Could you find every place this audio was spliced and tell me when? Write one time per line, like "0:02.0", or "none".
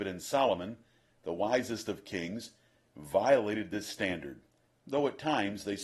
none